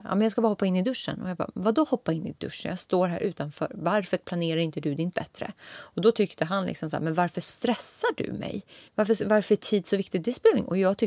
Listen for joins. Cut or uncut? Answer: cut